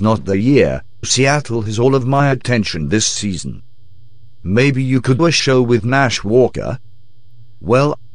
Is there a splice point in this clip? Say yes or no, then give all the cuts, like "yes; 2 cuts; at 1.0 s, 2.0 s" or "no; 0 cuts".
yes; 2 cuts; at 1.0 s, 5.2 s